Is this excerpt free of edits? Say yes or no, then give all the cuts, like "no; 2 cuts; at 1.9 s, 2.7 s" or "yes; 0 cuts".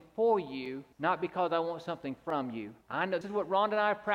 no; 3 cuts; at 0.9 s, 2.8 s, 3.2 s